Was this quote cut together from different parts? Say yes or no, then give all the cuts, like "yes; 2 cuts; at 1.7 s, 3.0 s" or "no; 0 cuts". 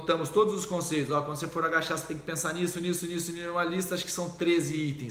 no; 0 cuts